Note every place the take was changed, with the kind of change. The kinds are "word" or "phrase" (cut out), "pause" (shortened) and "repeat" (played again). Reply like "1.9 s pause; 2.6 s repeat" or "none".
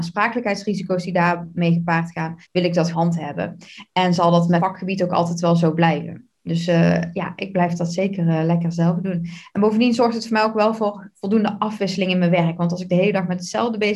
2.4 s pause; 2.9 s phrase; 4.6 s word